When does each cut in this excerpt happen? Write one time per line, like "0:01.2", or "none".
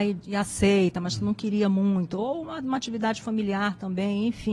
none